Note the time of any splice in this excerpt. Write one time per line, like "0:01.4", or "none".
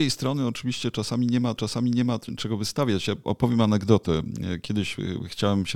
0:01.6
0:03.2